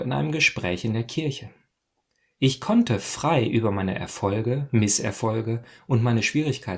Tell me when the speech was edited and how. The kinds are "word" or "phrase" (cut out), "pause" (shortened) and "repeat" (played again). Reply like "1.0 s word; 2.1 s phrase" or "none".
none